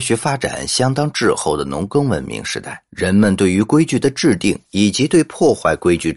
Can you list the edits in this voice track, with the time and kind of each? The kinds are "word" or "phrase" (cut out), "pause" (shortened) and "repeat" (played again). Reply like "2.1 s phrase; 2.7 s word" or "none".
2.9 s pause